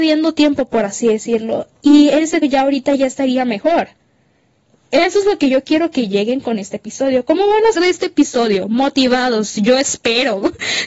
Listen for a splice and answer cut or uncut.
cut